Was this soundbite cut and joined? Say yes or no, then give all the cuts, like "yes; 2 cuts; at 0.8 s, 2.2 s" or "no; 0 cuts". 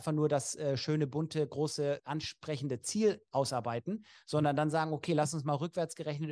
yes; 1 cut; at 2.0 s